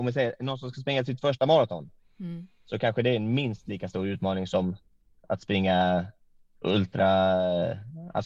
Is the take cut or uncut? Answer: uncut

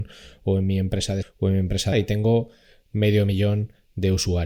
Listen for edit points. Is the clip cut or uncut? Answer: cut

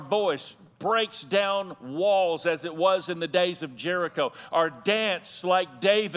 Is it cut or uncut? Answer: uncut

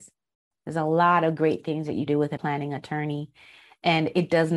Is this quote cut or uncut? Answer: cut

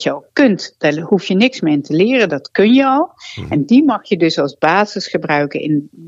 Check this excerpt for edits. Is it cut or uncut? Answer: uncut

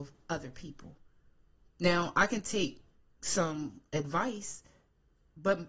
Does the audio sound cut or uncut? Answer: uncut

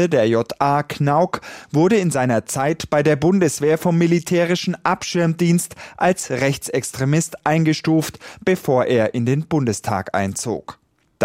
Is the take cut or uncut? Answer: uncut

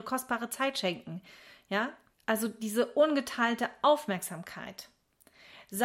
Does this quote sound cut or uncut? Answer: cut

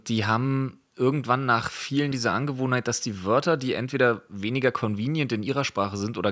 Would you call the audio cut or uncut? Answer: cut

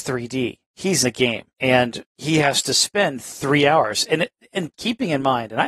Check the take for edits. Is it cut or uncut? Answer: cut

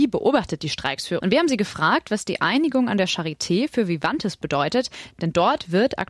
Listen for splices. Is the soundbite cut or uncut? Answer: cut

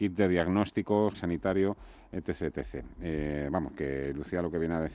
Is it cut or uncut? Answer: cut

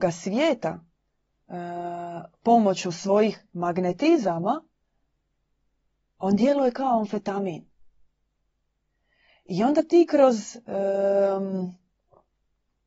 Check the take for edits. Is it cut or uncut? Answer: uncut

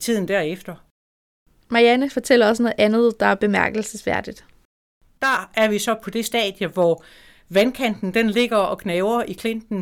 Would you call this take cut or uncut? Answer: uncut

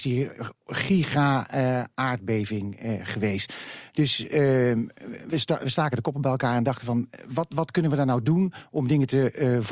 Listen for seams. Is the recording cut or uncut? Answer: uncut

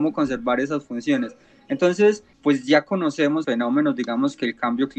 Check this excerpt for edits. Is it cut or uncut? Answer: cut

